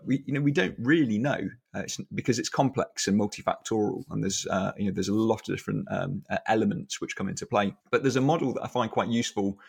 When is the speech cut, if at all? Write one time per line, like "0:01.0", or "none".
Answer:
0:07.8